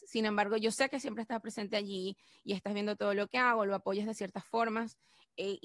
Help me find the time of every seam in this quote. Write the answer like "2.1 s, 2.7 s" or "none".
none